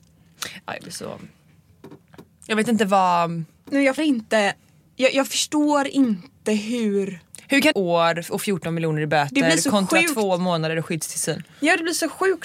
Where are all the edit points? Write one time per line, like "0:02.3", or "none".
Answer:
0:04.0
0:07.7